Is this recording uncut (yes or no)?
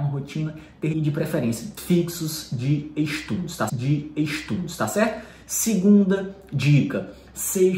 no